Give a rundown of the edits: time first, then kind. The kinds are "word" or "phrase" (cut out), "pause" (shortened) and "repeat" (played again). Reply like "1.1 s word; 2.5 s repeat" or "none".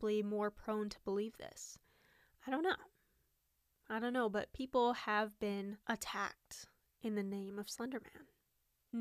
none